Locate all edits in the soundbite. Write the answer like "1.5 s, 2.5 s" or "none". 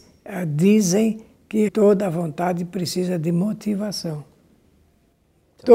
1.7 s

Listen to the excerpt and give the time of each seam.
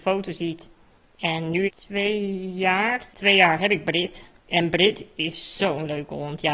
1.7 s, 3.1 s, 4.4 s

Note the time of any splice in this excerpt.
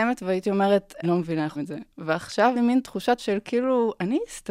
1.0 s, 1.6 s, 2.5 s, 3.2 s

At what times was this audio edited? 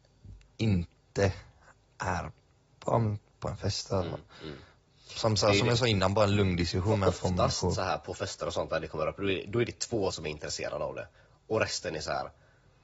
10.1 s

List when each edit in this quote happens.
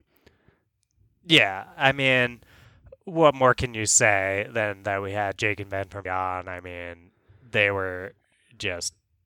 6.0 s

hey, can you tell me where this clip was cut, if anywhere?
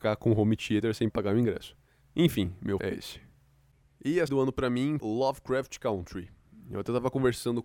1.1 s, 2.8 s, 4.3 s, 5.0 s

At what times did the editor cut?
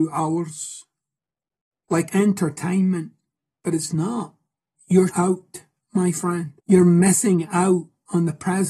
2.1 s, 5.1 s, 6.6 s

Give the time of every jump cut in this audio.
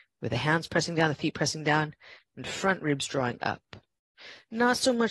none

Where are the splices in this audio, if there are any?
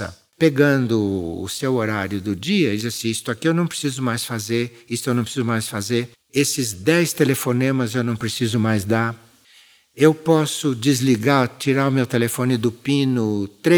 6.1 s

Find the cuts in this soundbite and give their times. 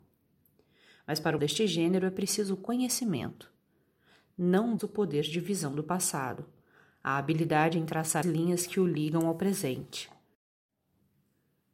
1.4 s, 4.8 s, 8.2 s

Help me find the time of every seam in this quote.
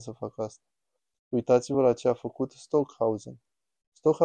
none

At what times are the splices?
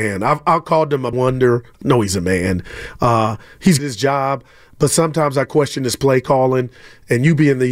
1.1 s, 3.8 s

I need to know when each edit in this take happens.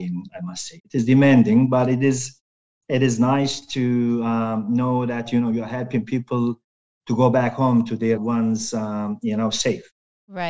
8.2 s

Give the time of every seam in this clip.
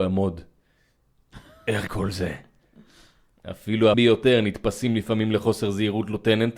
1.9 s, 3.9 s

